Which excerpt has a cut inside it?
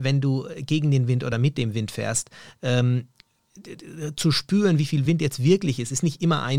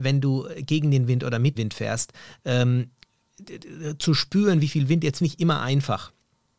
second; 2 cuts; at 1.5 s, 5.2 s

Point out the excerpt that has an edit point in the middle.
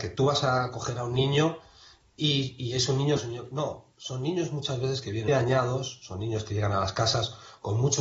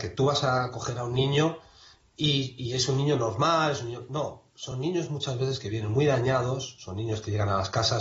first; 2 cuts; at 3.2 s, 5.3 s

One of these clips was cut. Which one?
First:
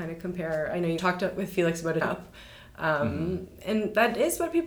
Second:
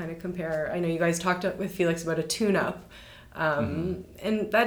first; 2 cuts; at 1.0 s, 2.0 s

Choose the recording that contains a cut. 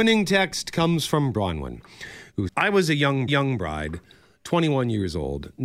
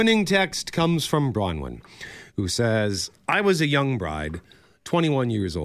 first; 2 cuts; at 2.5 s, 3.3 s

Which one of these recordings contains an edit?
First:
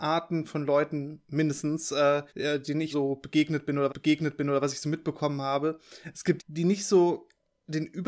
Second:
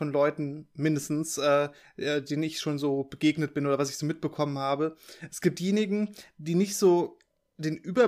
first; 4 cuts; at 2.3 s, 2.9 s, 3.9 s, 6.4 s

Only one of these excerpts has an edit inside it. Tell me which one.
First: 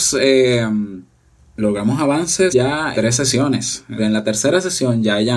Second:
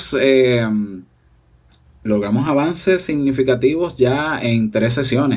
first; 4 cuts; at 1.4 s, 2.5 s, 2.9 s, 4.0 s

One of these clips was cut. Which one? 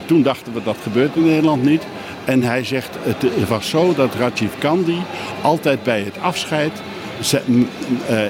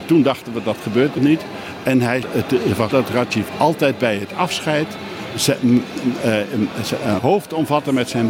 second; 5 cuts; at 1.2 s, 2.2 s, 2.9 s, 3.5 s, 7.2 s

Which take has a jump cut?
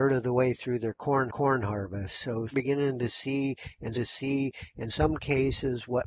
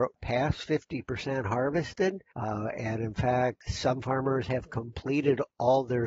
first; 3 cuts; at 1.3 s, 2.5 s, 3.9 s

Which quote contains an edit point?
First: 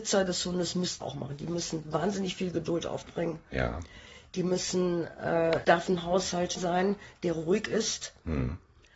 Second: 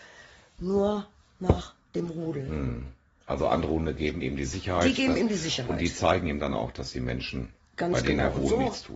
first; 3 cuts; at 1.0 s, 5.6 s, 6.6 s

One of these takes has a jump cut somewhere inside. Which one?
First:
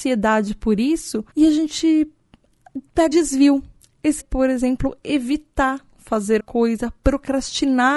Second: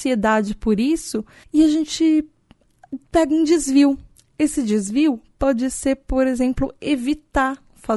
first; 4 cuts; at 1.3 s, 3.1 s, 4.2 s, 6.4 s

